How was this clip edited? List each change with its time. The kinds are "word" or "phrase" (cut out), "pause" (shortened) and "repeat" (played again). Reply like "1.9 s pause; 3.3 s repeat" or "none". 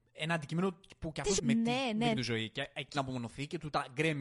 1.4 s word; 2.1 s word; 2.9 s word